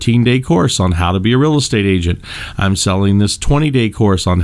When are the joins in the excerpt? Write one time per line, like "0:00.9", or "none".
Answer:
none